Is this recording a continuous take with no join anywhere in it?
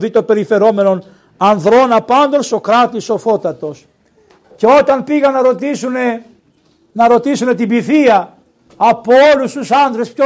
yes; 0 cuts

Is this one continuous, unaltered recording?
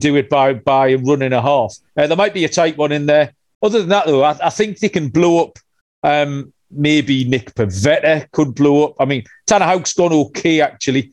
yes; 0 cuts

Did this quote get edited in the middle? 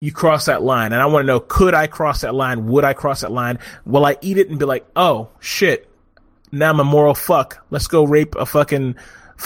no; 0 cuts

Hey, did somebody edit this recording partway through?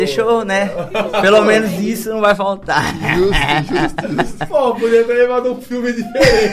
no; 0 cuts

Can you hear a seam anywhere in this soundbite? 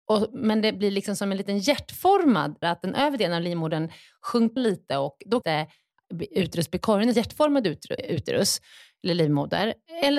yes; 5 cuts; at 2.6 s, 4.6 s, 5.4 s, 7.1 s, 8.0 s

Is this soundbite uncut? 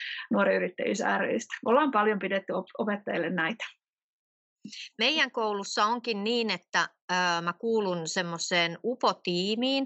yes; 0 cuts

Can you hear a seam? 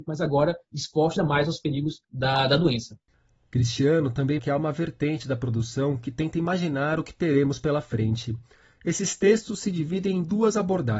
yes; 3 cuts; at 1.2 s, 2.0 s, 4.4 s

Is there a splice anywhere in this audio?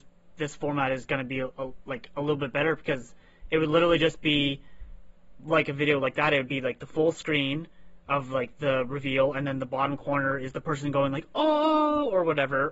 no; 0 cuts

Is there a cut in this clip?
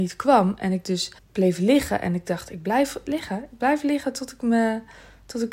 yes; 1 cut; at 1.2 s

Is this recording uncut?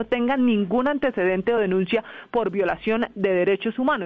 yes; 0 cuts

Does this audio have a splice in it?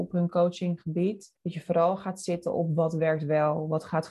yes; 1 cut; at 1.4 s

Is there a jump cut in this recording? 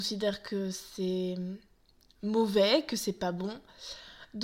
no; 0 cuts

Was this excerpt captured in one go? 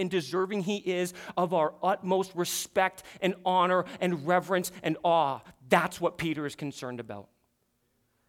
yes; 0 cuts

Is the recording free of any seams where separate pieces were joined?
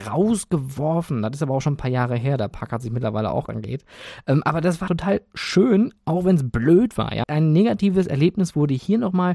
no; 3 cuts; at 3.5 s, 4.9 s, 7.2 s

